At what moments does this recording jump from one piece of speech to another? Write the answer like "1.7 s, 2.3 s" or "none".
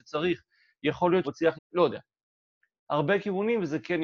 1.2 s, 1.5 s